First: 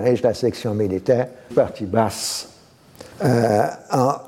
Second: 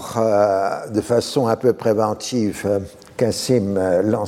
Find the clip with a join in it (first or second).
first